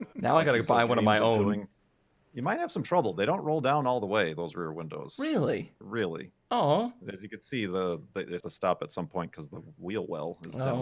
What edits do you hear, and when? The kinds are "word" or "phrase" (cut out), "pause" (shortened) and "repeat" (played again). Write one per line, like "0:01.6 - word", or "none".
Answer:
0:01.8 - pause
0:05.8 - pause
0:08.4 - word